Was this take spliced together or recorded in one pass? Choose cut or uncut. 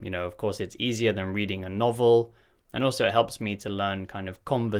uncut